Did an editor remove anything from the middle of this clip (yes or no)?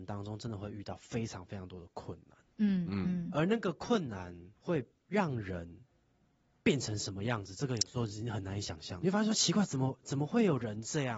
yes